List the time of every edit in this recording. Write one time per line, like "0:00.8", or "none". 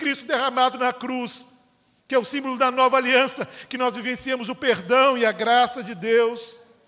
none